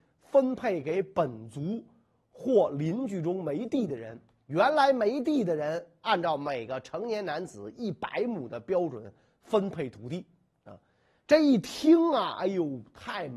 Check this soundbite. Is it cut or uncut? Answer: uncut